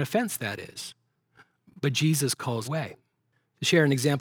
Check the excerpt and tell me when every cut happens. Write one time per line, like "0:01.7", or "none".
0:02.6